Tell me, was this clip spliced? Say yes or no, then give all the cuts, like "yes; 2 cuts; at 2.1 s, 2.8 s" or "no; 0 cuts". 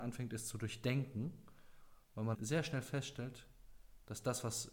yes; 2 cuts; at 2.0 s, 2.3 s